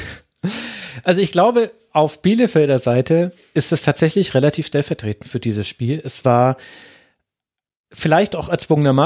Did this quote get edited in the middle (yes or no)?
no